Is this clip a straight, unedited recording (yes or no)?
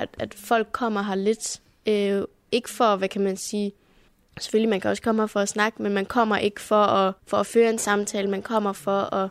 no